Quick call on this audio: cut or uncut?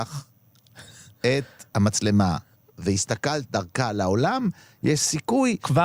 uncut